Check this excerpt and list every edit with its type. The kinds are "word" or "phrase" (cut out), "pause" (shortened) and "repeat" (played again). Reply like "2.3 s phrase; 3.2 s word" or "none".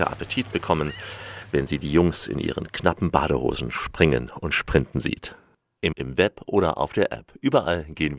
5.9 s word